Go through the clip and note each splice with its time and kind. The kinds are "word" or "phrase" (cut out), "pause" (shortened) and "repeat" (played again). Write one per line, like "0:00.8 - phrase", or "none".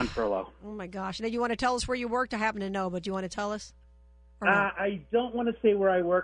none